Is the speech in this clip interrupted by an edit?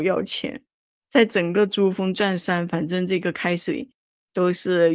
no; 0 cuts

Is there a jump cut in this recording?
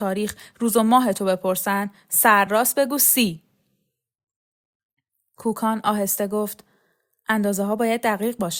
no; 0 cuts

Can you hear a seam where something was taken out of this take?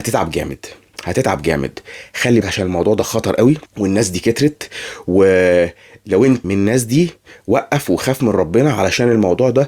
yes; 3 cuts; at 2.4 s, 3.7 s, 6.4 s

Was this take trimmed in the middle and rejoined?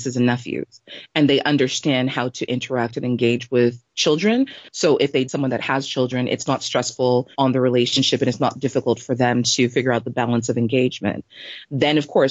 yes; 2 cuts; at 5.3 s, 7.3 s

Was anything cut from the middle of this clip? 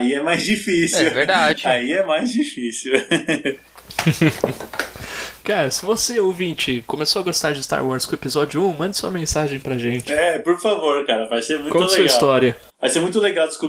no; 0 cuts

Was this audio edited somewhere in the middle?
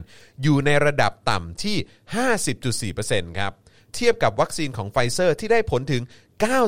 no; 0 cuts

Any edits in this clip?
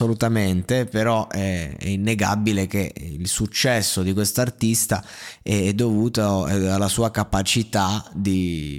no; 0 cuts

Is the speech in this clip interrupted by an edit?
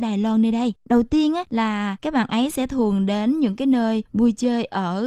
no; 0 cuts

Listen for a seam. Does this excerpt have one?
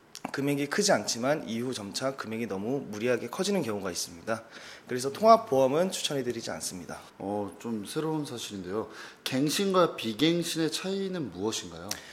yes; 1 cut; at 7.1 s

